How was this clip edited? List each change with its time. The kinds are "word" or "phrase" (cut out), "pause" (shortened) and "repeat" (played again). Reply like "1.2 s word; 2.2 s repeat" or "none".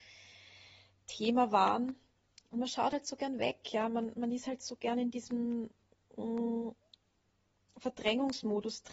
none